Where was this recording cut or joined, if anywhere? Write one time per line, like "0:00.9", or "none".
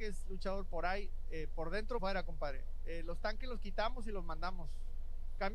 0:02.0